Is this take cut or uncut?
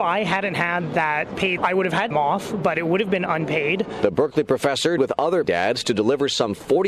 cut